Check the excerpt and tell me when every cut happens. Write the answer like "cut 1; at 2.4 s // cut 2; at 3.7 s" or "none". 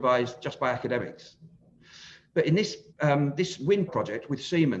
cut 1; at 2.9 s // cut 2; at 3.9 s